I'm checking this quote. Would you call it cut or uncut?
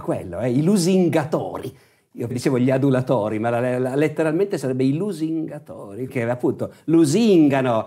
cut